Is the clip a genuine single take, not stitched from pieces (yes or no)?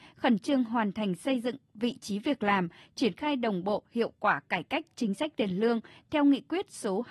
yes